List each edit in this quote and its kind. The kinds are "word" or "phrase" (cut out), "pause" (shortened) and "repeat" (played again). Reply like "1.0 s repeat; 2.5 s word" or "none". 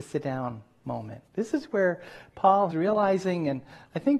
1.3 s pause; 2.7 s word